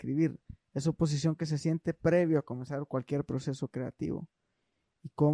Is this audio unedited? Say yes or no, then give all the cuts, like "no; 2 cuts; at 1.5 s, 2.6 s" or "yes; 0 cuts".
yes; 0 cuts